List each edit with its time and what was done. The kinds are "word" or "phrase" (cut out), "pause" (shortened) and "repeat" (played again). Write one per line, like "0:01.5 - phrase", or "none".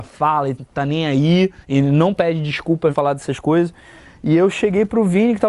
0:01.6 - pause
0:02.9 - word